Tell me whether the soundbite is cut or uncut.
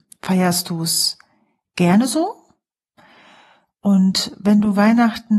uncut